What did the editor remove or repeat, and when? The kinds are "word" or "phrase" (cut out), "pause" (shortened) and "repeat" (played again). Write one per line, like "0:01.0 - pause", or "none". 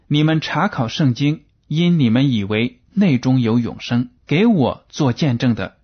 0:01.6 - pause
0:04.2 - pause